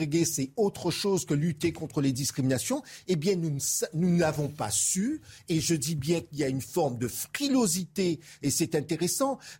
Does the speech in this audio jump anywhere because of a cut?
no; 0 cuts

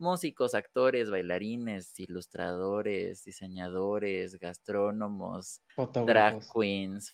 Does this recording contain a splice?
yes; 1 cut; at 5.7 s

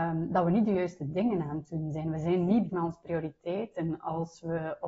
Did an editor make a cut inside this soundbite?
yes; 1 cut; at 2.7 s

